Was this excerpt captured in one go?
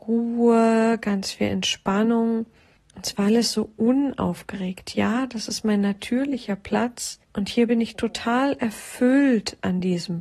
no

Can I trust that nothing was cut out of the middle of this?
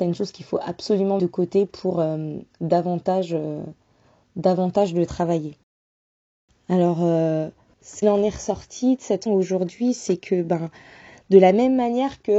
no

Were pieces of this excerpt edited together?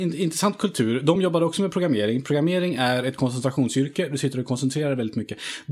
no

